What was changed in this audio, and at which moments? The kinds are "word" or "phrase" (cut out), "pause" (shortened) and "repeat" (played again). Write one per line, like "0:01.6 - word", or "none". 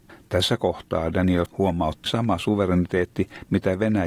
0:01.5 - word
0:02.1 - phrase